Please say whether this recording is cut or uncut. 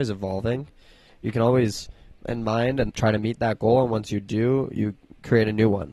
cut